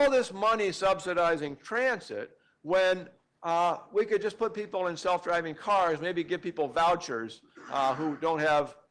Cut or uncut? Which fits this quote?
uncut